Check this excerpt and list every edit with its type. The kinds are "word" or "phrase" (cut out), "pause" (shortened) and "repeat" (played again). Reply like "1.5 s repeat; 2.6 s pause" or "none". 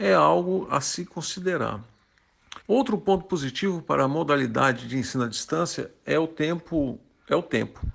2.6 s pause